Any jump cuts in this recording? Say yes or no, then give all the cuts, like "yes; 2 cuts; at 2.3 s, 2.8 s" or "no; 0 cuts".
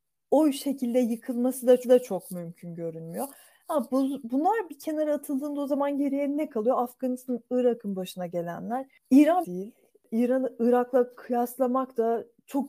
yes; 2 cuts; at 1.8 s, 9.4 s